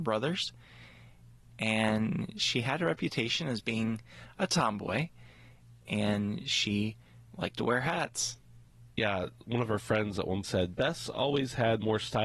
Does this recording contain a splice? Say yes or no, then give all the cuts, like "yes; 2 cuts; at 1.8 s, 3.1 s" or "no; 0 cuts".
yes; 2 cuts; at 7.3 s, 10.4 s